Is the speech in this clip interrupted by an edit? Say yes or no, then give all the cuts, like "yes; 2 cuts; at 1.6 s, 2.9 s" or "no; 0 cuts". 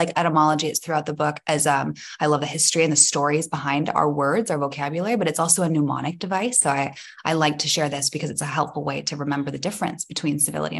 no; 0 cuts